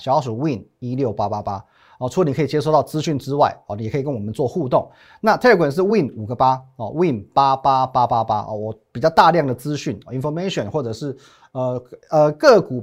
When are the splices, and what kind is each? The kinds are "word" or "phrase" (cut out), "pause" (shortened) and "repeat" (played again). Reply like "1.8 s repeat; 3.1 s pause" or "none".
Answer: none